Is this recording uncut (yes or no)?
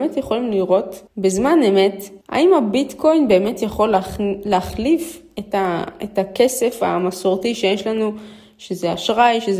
no